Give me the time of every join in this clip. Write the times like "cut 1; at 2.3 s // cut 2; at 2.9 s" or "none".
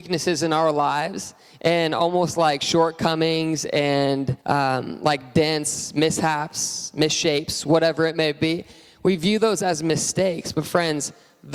cut 1; at 4.4 s

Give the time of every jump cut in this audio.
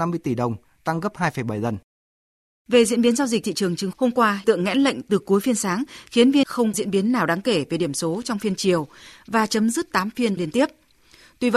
cut 1; at 3.4 s // cut 2; at 3.9 s // cut 3; at 4.4 s // cut 4; at 6.4 s // cut 5; at 6.7 s // cut 6; at 9.9 s // cut 7; at 10.4 s

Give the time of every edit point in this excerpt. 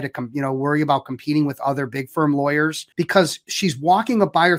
cut 1; at 2.9 s

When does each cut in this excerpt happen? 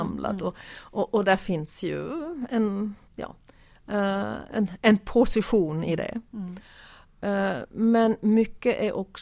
cut 1; at 3.1 s

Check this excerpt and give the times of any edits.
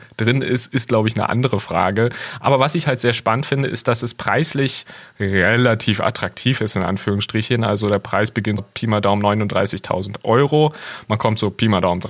cut 1; at 8.6 s

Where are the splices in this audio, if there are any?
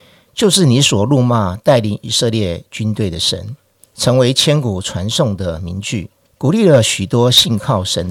cut 1; at 3.9 s // cut 2; at 6.2 s

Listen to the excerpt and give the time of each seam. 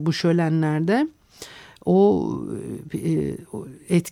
none

